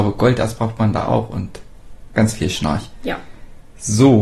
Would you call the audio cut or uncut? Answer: uncut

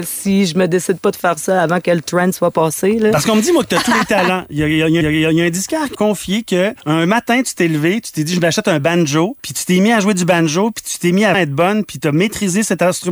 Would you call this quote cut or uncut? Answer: cut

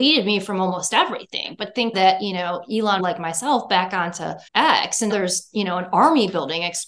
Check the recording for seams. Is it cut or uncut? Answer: cut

